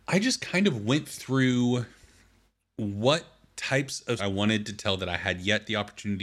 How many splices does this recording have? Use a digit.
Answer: 1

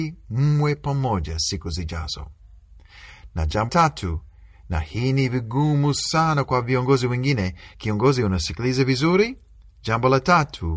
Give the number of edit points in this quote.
1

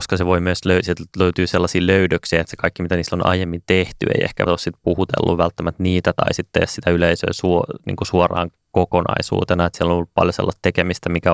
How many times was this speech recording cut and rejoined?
2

